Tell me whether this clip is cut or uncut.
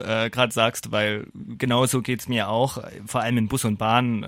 uncut